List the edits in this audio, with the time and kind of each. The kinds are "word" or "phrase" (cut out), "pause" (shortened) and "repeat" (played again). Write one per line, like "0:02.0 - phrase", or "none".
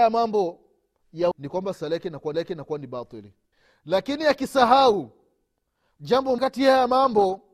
0:01.3 - word
0:02.3 - repeat
0:03.5 - pause
0:06.4 - word